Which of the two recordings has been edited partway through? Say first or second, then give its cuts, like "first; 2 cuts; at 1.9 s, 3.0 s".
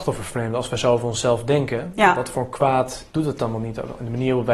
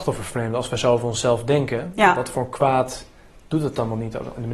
first; 1 cut; at 3.1 s